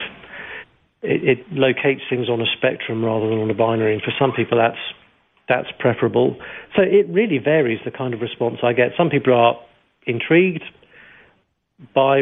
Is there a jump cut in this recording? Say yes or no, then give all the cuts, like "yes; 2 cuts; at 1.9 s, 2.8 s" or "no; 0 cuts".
no; 0 cuts